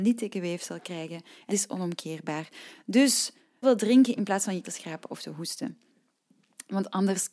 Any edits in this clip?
yes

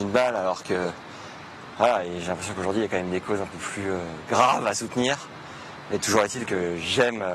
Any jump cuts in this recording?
no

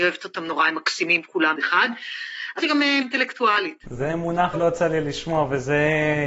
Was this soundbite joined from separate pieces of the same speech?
yes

